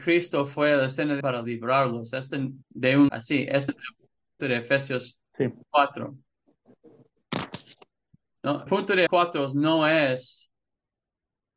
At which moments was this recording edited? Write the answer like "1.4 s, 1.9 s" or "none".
1.2 s, 2.6 s, 3.1 s, 3.7 s, 4.4 s, 8.7 s, 9.1 s